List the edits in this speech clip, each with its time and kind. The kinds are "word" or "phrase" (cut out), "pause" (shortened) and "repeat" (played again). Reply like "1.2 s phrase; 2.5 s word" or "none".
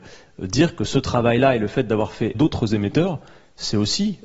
2.3 s word